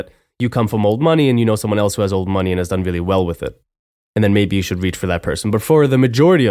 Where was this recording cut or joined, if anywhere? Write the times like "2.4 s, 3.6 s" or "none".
none